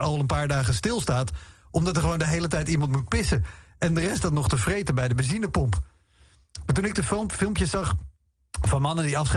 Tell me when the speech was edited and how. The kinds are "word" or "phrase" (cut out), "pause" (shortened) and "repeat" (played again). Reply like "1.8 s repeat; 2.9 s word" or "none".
none

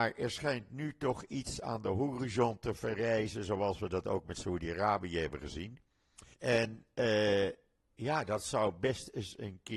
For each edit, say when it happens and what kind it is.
6.3 s pause

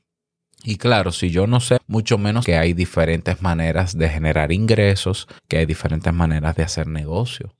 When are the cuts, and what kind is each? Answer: 1.8 s word; 2.4 s word; 5.4 s pause

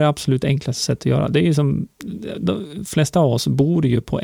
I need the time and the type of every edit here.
none

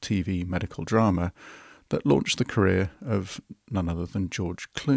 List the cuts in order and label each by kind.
none

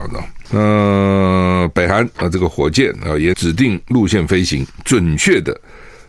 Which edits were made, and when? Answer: 3.3 s word

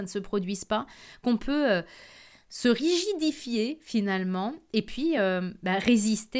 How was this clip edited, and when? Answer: none

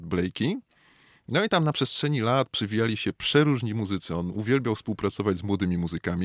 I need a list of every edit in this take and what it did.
none

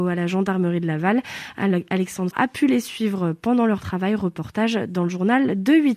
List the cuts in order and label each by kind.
2.3 s word

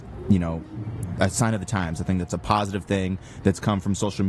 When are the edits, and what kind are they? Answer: none

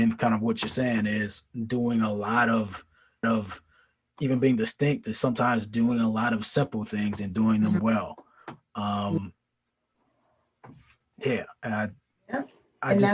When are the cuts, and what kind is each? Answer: 3.2 s repeat

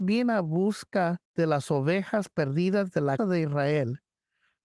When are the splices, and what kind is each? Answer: 1.2 s pause; 3.2 s word

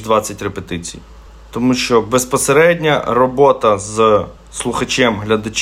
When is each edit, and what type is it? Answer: none

